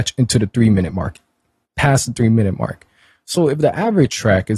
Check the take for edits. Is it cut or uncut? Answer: uncut